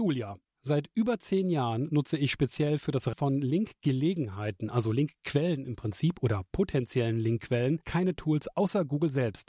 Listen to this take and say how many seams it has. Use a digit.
1